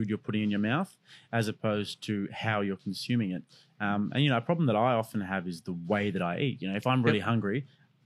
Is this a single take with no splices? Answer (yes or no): yes